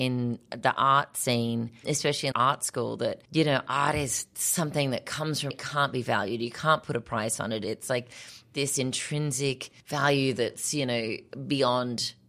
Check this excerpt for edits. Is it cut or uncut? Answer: cut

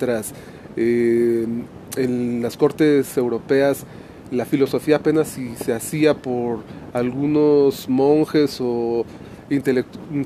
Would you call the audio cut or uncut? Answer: uncut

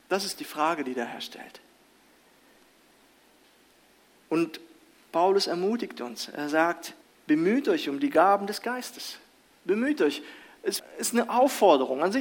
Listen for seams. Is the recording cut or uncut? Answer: cut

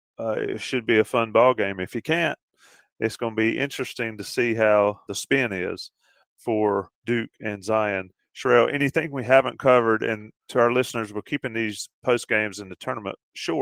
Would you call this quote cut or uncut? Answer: cut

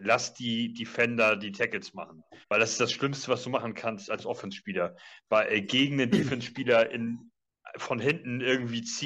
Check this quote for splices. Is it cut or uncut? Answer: cut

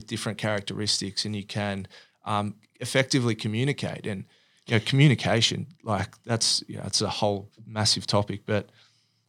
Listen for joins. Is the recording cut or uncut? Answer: uncut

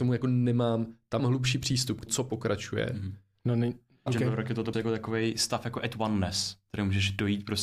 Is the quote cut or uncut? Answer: cut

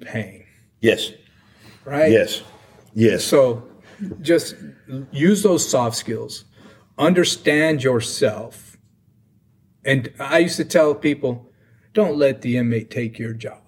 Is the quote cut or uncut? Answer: uncut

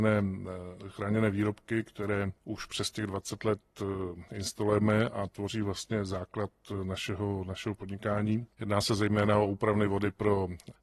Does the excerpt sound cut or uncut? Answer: cut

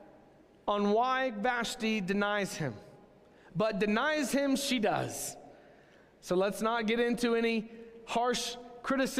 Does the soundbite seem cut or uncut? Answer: uncut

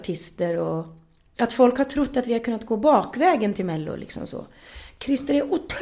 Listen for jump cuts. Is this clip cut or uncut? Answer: uncut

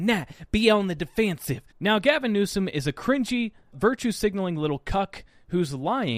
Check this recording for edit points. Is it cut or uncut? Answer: cut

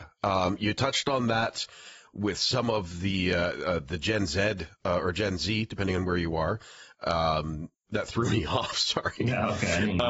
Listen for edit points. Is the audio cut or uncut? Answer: uncut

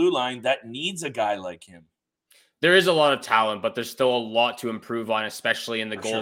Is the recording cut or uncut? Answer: uncut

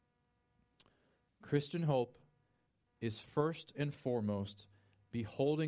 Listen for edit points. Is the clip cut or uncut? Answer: uncut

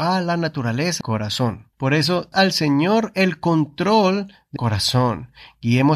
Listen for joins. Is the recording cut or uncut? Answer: cut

